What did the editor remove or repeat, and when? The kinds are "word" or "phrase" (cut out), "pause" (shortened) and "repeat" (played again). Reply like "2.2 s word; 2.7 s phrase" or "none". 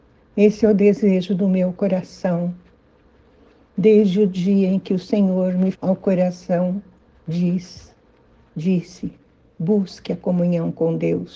5.7 s word; 7.1 s pause